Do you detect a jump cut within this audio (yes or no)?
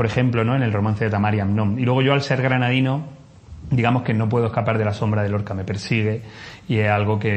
no